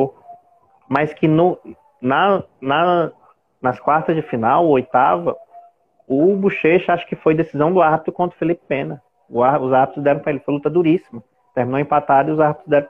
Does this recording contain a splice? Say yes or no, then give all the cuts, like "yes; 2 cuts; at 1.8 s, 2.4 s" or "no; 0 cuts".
no; 0 cuts